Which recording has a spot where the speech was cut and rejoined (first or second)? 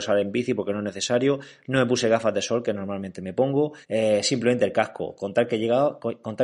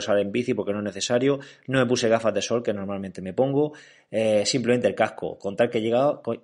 first